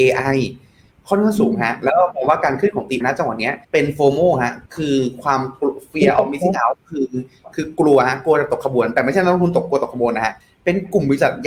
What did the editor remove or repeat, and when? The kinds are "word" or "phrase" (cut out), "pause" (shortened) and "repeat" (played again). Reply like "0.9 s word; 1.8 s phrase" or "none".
3.0 s word; 3.6 s pause; 4.7 s pause; 10.4 s pause